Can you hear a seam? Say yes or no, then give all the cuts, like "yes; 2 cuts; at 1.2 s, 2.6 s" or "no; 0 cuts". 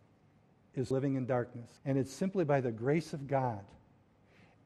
yes; 2 cuts; at 0.9 s, 1.8 s